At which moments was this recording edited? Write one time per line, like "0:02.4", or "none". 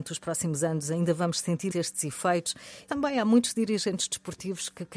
0:01.7
0:02.9

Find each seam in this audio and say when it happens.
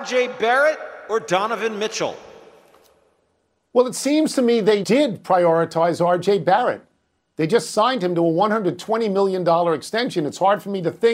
0:04.8

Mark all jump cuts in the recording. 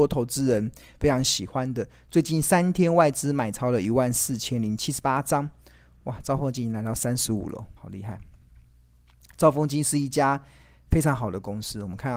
0:07.8

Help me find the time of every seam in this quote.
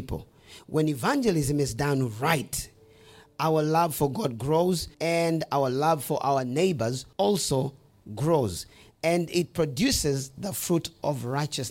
0:04.9
0:07.1

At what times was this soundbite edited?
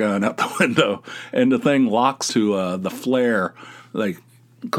0:02.3

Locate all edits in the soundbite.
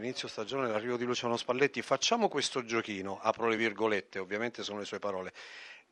none

